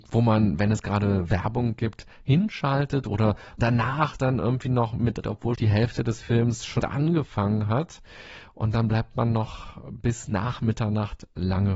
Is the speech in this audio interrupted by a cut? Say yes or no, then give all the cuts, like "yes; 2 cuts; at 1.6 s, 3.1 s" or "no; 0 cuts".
yes; 4 cuts; at 3.6 s, 5.2 s, 5.6 s, 6.8 s